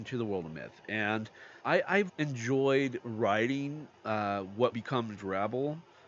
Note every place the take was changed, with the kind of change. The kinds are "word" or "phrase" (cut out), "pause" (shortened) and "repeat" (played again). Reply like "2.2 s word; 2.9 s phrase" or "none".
1.6 s pause; 2.1 s word; 4.0 s pause; 4.7 s word